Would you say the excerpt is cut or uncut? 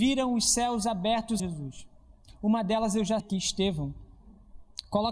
cut